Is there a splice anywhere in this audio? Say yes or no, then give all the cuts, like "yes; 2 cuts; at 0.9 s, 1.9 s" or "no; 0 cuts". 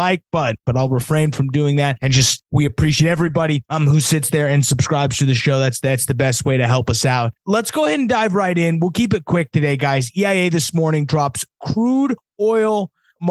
no; 0 cuts